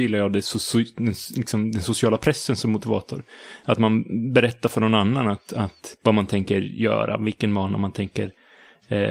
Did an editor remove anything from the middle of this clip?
yes; 1 cut; at 6.0 s

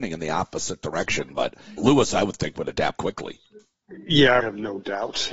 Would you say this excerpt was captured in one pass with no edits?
no; 3 cuts; at 1.8 s, 3.0 s, 4.4 s

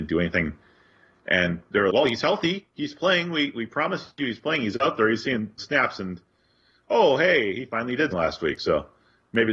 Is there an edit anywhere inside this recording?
yes; 4 cuts; at 1.9 s, 2.7 s, 5.6 s, 8.1 s

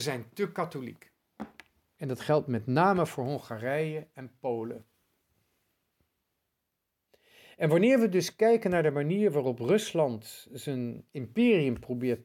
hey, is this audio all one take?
yes; 0 cuts

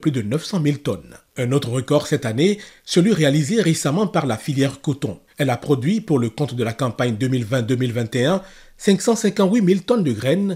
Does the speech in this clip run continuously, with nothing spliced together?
no; 2 cuts; at 1.3 s, 5.3 s

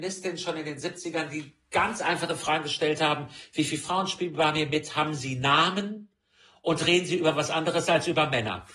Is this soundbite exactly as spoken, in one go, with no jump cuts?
yes; 0 cuts

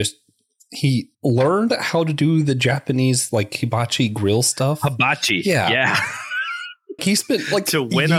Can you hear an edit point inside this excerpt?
yes; 2 cuts; at 1.1 s, 7.0 s

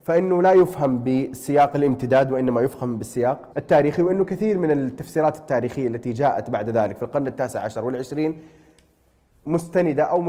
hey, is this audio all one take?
no; 1 cut; at 3.5 s

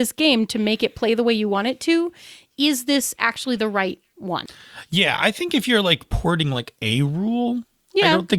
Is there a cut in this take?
no; 0 cuts

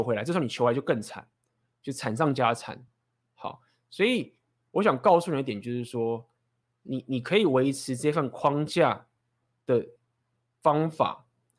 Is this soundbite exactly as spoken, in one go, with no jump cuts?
yes; 0 cuts

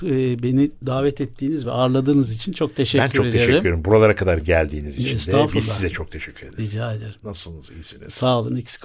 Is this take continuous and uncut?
yes; 0 cuts

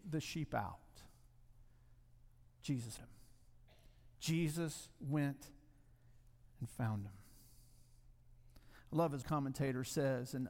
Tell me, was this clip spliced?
yes; 2 cuts; at 3.0 s, 9.2 s

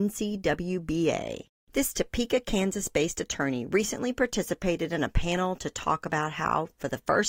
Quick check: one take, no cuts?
yes; 0 cuts

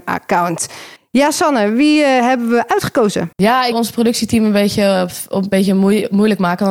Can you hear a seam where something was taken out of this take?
yes; 3 cuts; at 1.0 s, 3.3 s, 3.7 s

